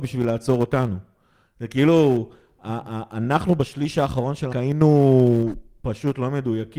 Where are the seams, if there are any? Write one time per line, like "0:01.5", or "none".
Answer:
0:04.5